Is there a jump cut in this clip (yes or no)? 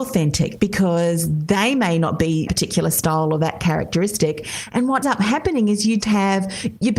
yes